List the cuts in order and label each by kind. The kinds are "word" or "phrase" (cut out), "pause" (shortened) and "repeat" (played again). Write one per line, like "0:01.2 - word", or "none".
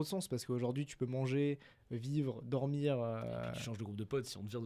none